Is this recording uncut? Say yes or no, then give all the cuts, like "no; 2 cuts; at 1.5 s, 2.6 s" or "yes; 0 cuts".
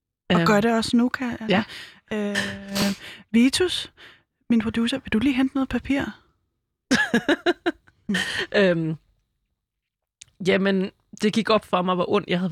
yes; 0 cuts